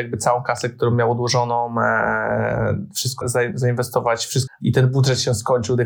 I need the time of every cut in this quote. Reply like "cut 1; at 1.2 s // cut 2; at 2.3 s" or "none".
cut 1; at 3.2 s // cut 2; at 4.5 s